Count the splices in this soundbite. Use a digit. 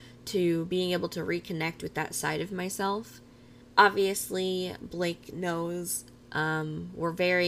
1